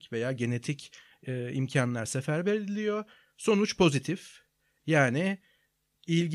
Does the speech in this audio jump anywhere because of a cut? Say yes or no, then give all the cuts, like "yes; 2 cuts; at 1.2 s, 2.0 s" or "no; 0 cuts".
no; 0 cuts